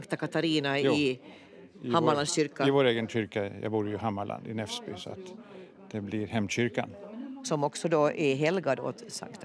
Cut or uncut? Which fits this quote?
uncut